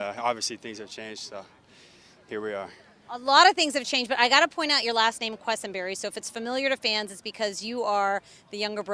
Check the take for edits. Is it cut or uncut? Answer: uncut